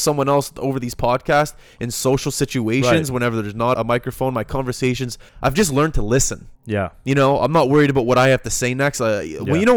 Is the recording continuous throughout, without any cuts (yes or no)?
no